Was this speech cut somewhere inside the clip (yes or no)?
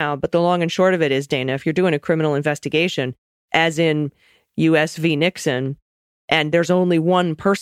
no